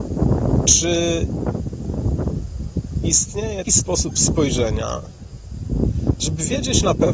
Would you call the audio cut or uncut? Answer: cut